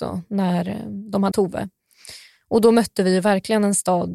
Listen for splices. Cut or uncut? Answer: cut